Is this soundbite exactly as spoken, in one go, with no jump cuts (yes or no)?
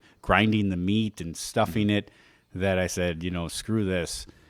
yes